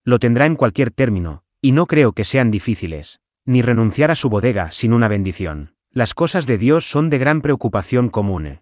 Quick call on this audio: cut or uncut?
cut